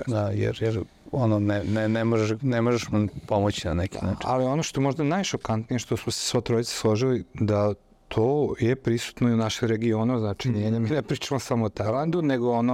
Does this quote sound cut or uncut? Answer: uncut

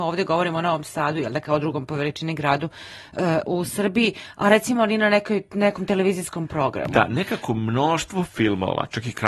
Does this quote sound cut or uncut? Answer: uncut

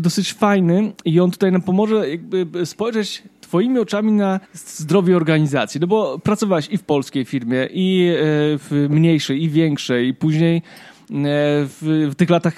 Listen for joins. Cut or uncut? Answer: cut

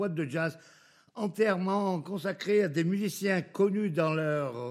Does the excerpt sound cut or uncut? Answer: uncut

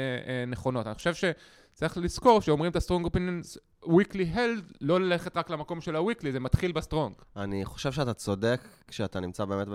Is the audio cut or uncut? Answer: uncut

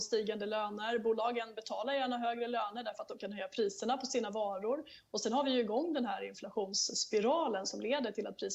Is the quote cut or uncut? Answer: uncut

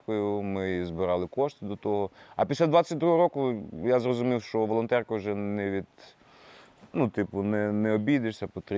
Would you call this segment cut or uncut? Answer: uncut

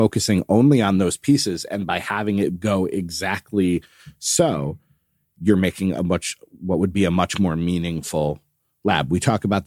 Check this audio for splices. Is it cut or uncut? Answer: uncut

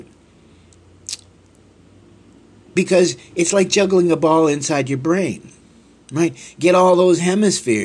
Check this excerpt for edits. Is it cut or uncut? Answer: uncut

